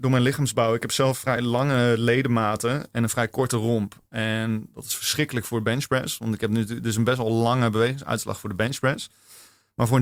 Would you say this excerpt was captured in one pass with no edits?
yes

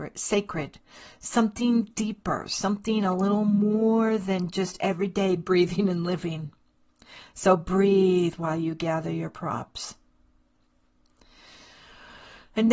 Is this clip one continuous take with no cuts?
yes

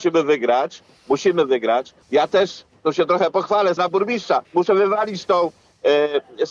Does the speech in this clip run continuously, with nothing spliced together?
no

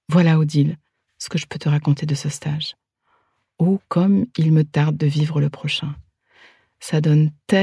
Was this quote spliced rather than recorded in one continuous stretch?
no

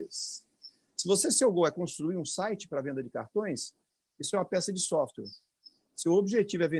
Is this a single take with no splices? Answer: yes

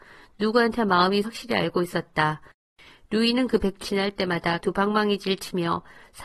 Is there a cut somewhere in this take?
yes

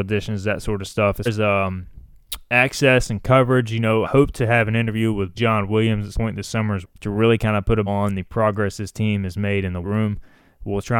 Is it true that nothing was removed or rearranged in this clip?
no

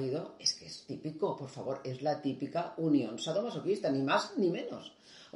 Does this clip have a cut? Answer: no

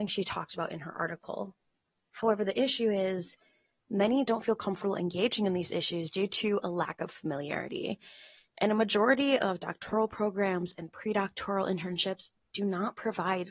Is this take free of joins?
yes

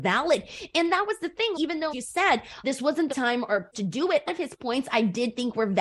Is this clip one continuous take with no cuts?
no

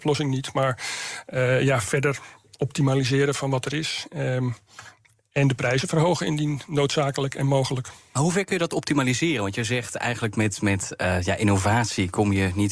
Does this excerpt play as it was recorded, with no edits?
yes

